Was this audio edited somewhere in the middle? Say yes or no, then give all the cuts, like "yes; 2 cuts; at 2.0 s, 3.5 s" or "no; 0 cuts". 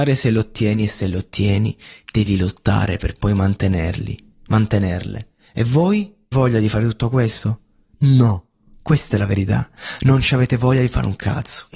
yes; 1 cut; at 6.3 s